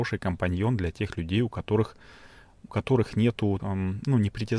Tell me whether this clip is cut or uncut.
cut